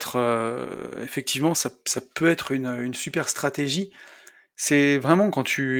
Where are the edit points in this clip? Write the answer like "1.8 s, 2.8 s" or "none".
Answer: none